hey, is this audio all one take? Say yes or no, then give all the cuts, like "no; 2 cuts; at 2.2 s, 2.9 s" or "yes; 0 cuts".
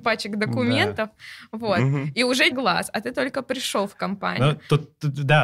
no; 1 cut; at 2.5 s